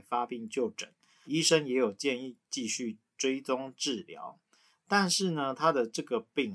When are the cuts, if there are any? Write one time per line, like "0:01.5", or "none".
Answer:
0:01.3